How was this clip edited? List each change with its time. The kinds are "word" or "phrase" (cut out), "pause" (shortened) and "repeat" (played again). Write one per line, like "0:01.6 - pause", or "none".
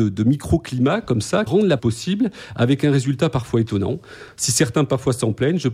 0:01.5 - word
0:01.8 - word